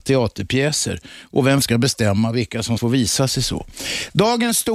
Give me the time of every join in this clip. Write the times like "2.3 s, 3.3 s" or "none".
1.6 s, 2.8 s